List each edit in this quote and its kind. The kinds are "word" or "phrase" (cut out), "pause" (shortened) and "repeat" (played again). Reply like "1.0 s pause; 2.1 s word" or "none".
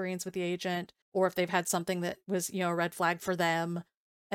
1.0 s pause

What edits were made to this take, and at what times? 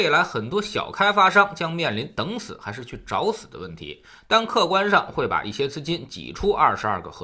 none

